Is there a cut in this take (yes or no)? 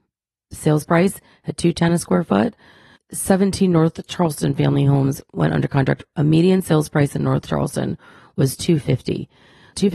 no